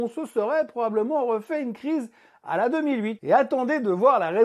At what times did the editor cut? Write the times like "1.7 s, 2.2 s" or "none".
none